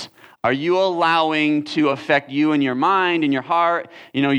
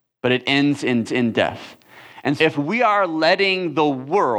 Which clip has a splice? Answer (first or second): second